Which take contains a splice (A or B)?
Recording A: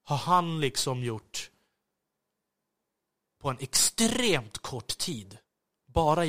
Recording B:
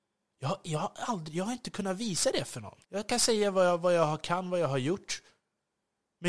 B